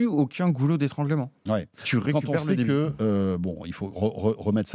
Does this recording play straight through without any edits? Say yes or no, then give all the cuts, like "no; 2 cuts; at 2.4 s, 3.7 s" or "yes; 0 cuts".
no; 1 cut; at 1.4 s